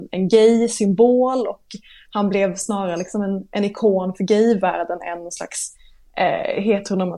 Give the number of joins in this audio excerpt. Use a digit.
0